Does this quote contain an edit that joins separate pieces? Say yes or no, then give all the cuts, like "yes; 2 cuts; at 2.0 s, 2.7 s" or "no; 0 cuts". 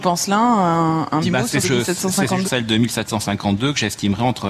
yes; 3 cuts; at 1.2 s, 1.6 s, 2.4 s